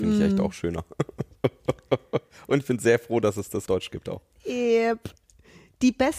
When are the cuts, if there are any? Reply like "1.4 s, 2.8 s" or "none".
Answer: 3.7 s

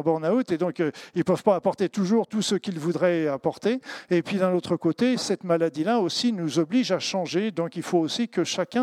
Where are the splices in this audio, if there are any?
none

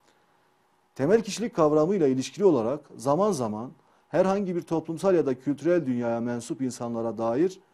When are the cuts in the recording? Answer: none

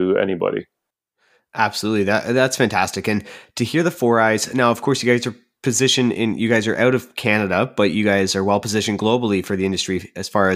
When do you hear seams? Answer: none

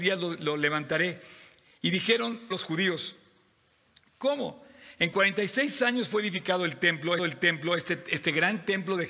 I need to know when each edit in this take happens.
2.5 s, 7.2 s

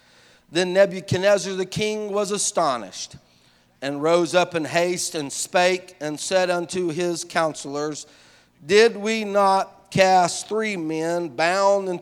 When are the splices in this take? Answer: none

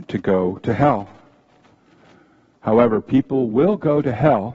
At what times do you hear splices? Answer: none

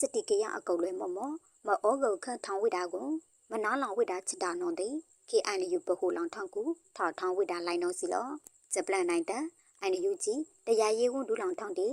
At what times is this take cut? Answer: none

